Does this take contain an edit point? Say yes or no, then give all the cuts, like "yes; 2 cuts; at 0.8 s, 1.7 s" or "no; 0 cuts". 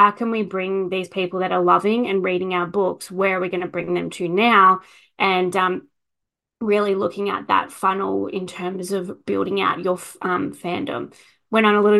no; 0 cuts